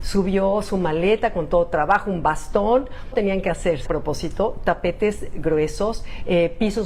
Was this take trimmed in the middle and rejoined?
yes; 2 cuts; at 3.1 s, 3.9 s

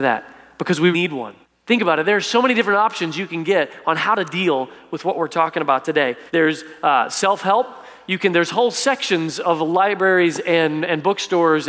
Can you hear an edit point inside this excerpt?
yes; 3 cuts; at 0.9 s, 1.4 s, 6.3 s

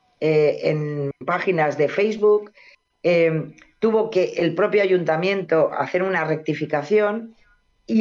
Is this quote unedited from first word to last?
yes; 0 cuts

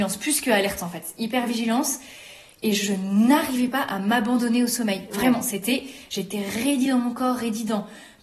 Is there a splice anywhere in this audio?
no; 0 cuts

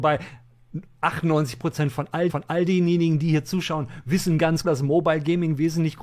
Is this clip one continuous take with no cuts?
no; 2 cuts; at 2.3 s, 4.6 s

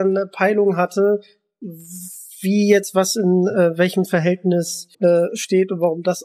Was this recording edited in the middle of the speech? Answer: yes; 1 cut; at 4.9 s

